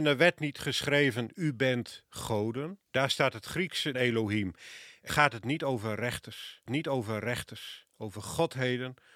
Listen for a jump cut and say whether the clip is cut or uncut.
cut